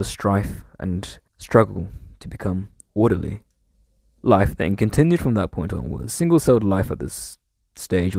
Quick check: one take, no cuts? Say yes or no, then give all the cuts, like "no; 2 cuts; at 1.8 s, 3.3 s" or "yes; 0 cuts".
no; 2 cuts; at 1.3 s, 3.7 s